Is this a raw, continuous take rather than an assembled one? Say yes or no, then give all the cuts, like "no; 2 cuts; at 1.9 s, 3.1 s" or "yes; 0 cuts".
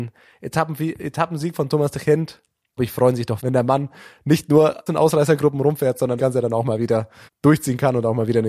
no; 5 cuts; at 2.8 s, 3.4 s, 4.9 s, 6.2 s, 7.3 s